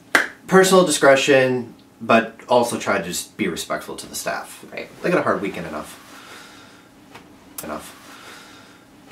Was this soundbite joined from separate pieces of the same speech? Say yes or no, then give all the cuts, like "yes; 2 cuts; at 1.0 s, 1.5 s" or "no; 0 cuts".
yes; 1 cut; at 7.6 s